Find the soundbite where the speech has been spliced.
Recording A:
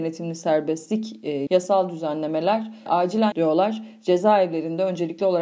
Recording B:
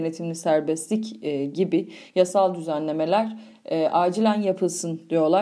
A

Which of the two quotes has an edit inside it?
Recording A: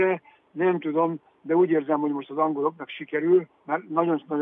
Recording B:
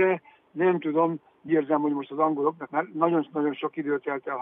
B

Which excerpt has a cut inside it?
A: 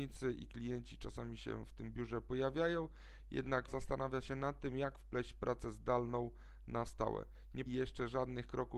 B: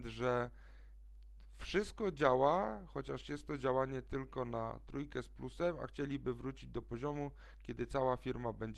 A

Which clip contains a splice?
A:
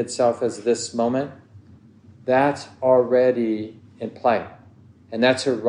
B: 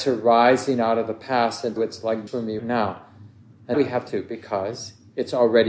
B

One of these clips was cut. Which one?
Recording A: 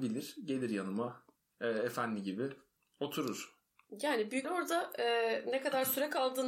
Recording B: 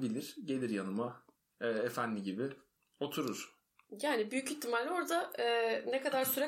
A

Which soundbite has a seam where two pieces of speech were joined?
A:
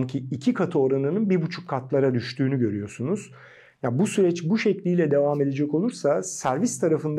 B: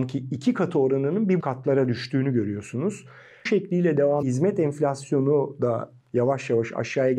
B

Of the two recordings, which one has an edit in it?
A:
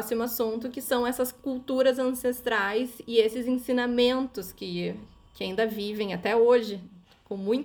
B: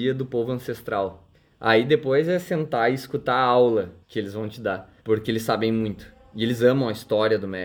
B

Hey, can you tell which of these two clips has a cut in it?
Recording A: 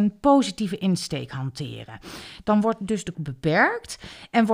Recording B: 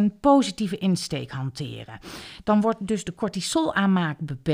A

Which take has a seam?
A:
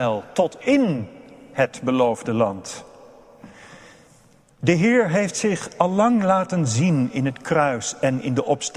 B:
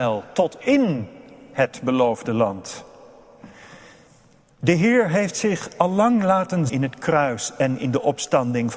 B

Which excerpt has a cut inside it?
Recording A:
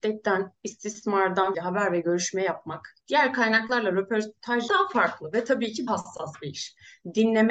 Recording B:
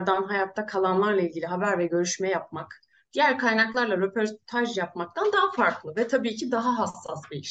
A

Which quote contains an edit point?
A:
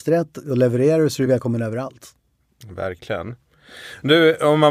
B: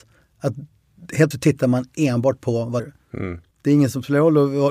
B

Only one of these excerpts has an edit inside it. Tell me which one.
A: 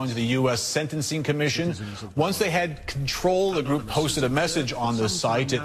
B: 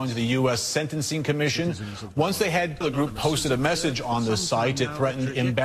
B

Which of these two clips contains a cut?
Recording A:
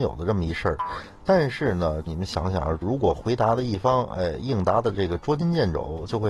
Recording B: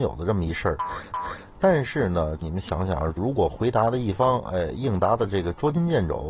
B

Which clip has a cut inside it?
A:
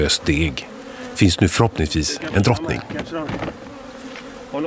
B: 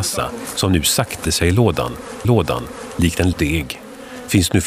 B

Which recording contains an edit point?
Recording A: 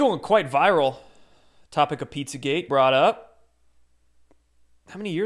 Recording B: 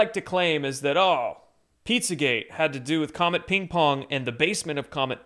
A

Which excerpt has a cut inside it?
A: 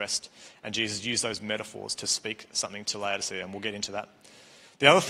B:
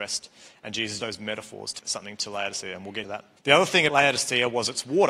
B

